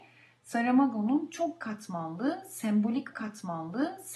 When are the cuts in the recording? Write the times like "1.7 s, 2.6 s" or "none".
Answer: 3.1 s